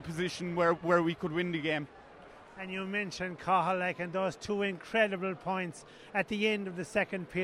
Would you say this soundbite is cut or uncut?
uncut